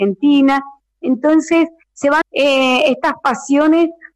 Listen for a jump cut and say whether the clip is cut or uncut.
cut